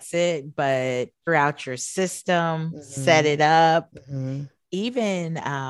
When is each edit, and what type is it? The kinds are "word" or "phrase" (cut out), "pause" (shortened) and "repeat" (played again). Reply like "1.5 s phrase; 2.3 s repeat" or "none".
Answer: 1.3 s word